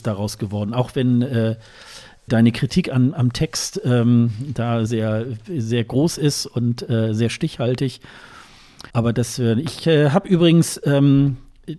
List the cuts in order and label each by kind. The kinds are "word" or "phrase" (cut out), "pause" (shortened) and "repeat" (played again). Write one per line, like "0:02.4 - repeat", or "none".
0:02.3 - word
0:04.9 - word
0:08.9 - pause

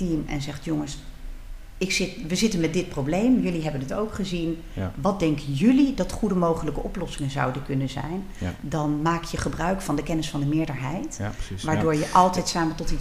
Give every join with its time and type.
none

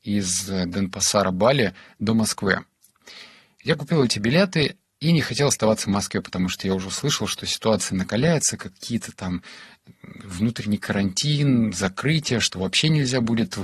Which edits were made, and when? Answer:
0:04.9 - pause

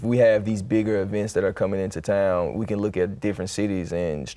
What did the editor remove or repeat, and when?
none

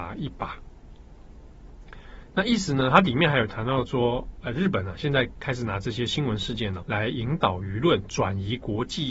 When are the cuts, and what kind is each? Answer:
0:06.8 - word

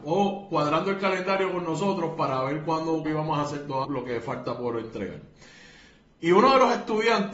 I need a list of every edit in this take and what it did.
0:03.1 - word
0:03.8 - word

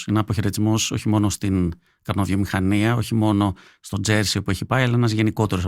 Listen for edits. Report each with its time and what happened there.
none

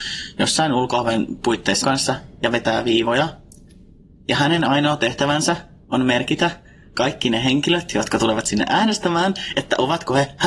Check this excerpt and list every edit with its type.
0:01.8 - word

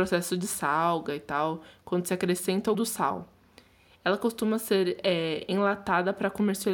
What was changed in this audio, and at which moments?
0:02.7 - word

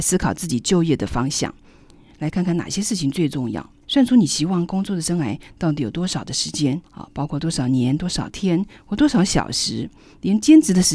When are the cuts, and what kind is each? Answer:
0:03.8 - pause
0:06.8 - pause

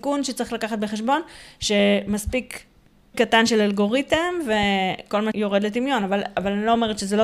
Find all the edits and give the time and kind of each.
0:03.1 - word
0:05.3 - word

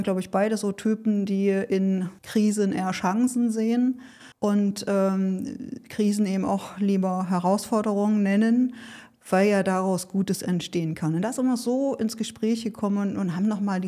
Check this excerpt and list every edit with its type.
0:02.2 - pause
0:04.3 - pause

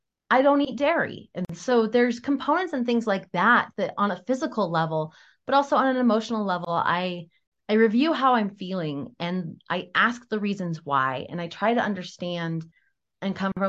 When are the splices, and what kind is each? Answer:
none

